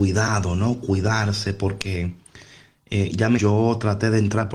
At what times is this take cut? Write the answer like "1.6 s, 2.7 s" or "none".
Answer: 3.4 s